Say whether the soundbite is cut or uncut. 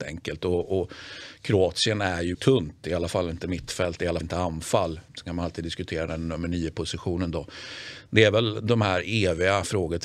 cut